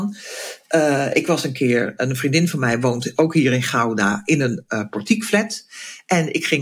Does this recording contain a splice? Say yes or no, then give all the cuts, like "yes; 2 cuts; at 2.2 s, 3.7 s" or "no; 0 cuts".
no; 0 cuts